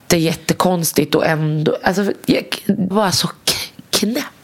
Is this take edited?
yes; 1 cut; at 2.9 s

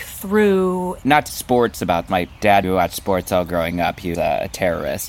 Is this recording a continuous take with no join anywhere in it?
no; 4 cuts; at 1.3 s, 2.1 s, 2.6 s, 4.1 s

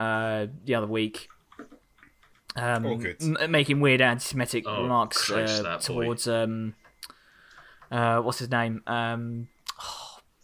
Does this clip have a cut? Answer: no; 0 cuts

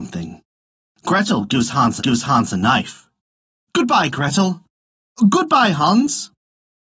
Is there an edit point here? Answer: yes; 1 cut; at 2.0 s

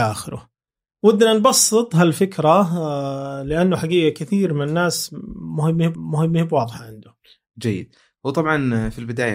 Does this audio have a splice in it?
yes; 1 cut; at 5.9 s

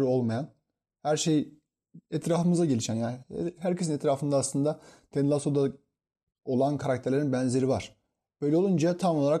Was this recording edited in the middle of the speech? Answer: no; 0 cuts

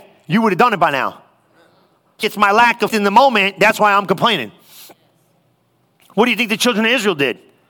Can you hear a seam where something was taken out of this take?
yes; 2 cuts; at 2.2 s, 2.9 s

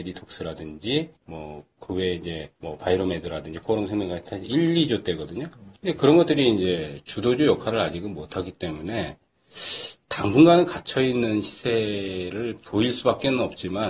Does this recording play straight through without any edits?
no; 4 cuts; at 1.2 s, 2.6 s, 5.8 s, 10.0 s

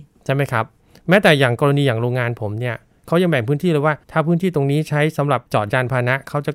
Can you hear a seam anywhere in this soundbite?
yes; 2 cuts; at 4.0 s, 5.5 s

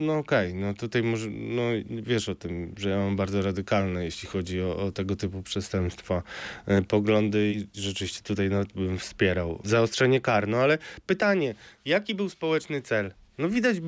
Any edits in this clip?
yes; 2 cuts; at 7.5 s, 9.6 s

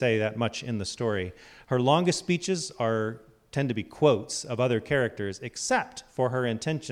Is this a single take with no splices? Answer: yes; 0 cuts

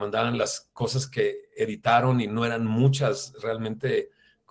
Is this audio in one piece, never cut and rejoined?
yes; 0 cuts

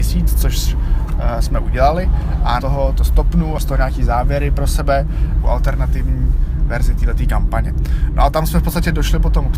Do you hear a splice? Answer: yes; 3 cuts; at 2.6 s, 3.6 s, 5.4 s

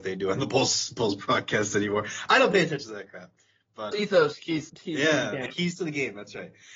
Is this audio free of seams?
no; 2 cuts; at 3.9 s, 4.7 s

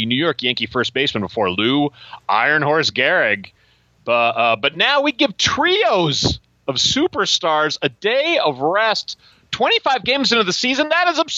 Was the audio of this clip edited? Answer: no; 0 cuts

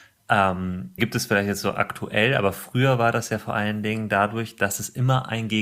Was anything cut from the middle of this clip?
yes; 1 cut; at 1.0 s

